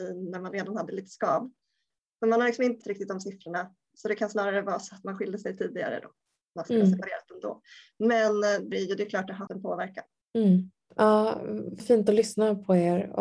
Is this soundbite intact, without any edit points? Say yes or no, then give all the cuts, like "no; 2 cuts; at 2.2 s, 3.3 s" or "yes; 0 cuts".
no; 6 cuts; at 2.8 s, 3.9 s, 8.7 s, 9.5 s, 10.2 s, 11.8 s